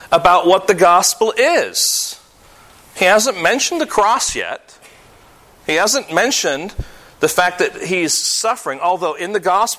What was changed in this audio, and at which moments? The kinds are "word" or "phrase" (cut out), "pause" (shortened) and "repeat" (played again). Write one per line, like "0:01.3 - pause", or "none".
none

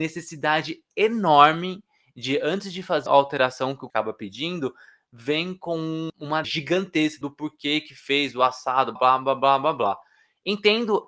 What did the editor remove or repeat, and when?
0:03.1 - word
0:03.9 - word
0:06.4 - word
0:07.2 - word
0:09.0 - word

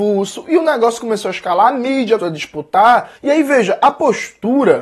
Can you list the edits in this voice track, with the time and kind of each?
0:02.2 - word
0:03.2 - pause

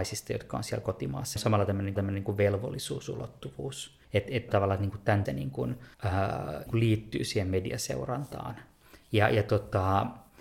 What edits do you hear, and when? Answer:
0:01.4 - phrase
0:02.0 - repeat
0:04.0 - pause
0:04.5 - word
0:05.3 - word
0:05.9 - pause
0:06.7 - word

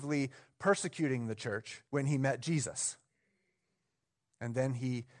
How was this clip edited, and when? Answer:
0:01.9 - pause

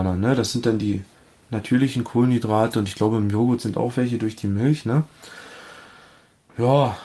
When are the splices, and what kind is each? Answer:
none

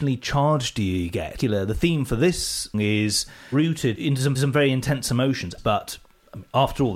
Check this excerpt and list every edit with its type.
0:02.7 - word
0:04.0 - word
0:04.4 - repeat
0:05.6 - phrase

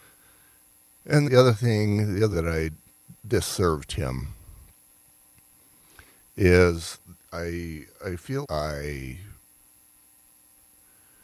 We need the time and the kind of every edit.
0:01.2 - word
0:02.3 - word
0:03.2 - pause
0:07.9 - pause
0:08.4 - word

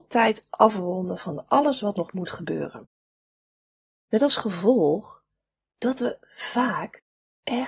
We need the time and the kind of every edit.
none

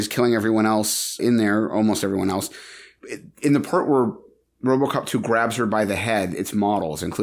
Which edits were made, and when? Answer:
0:01.2 - word

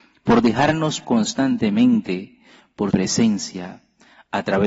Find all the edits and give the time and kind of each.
0:01.0 - word
0:02.9 - word

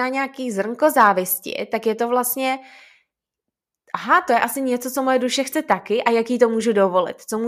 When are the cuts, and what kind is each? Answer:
none

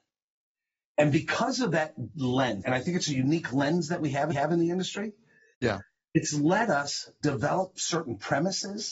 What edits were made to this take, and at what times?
0:02.6 - word
0:04.3 - repeat
0:07.2 - word

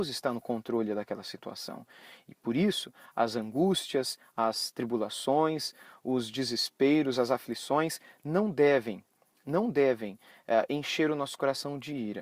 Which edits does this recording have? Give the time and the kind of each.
none

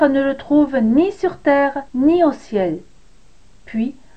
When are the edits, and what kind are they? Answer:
0:01.9 - pause

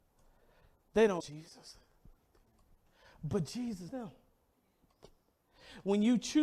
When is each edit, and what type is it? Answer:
0:01.2 - word
0:03.9 - word

